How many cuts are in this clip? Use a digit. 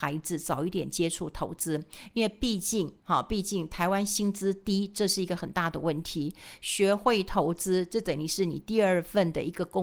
1